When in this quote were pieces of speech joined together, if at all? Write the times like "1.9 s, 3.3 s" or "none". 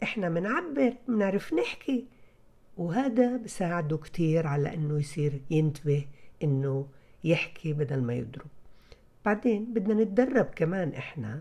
none